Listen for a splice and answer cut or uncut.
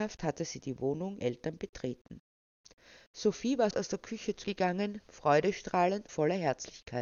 cut